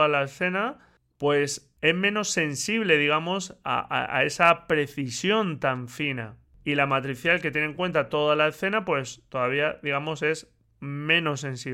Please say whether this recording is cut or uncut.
uncut